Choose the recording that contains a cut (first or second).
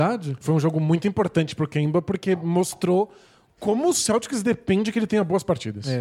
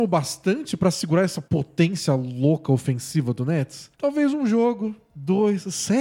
second